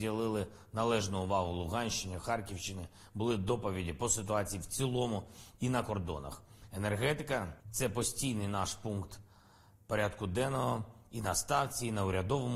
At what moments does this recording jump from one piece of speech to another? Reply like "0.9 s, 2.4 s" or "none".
7.6 s